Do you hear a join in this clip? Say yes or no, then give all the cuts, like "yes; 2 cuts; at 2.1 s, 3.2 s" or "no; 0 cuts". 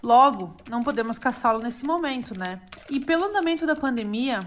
yes; 1 cut; at 2.8 s